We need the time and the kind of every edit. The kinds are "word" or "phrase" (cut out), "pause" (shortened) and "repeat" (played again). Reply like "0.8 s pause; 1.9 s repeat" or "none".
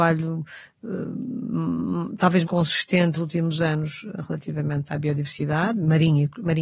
2.5 s word; 3.2 s word; 4.9 s word